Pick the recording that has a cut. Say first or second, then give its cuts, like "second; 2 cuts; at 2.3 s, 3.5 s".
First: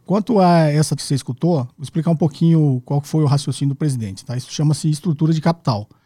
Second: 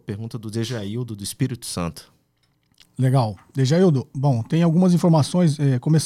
first; 2 cuts; at 1.0 s, 1.7 s